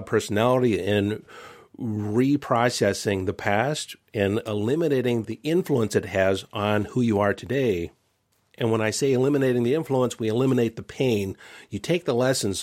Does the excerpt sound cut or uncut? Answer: cut